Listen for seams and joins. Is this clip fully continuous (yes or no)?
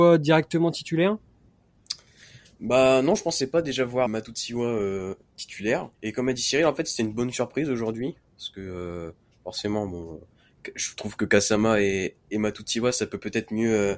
no